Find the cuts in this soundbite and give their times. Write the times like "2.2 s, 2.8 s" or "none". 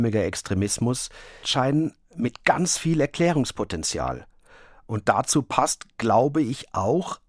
1.4 s